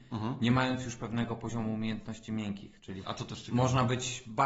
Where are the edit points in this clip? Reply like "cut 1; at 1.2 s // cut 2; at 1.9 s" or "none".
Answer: cut 1; at 3.0 s